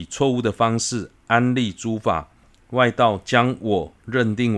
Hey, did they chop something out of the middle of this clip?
yes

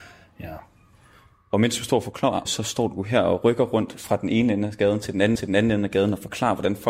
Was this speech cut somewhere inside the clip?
yes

